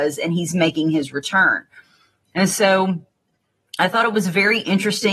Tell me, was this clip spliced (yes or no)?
no